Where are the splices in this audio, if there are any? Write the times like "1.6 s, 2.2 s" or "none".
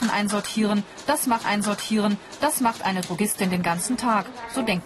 1.4 s